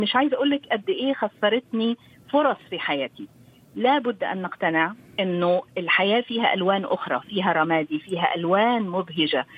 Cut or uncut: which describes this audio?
uncut